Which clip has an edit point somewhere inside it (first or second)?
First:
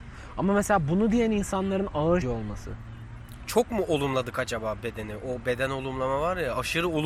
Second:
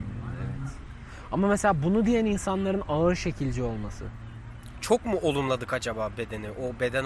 first